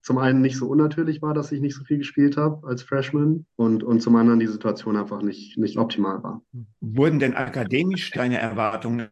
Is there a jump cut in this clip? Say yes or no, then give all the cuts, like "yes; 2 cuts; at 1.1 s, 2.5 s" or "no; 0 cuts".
yes; 2 cuts; at 3.5 s, 6.8 s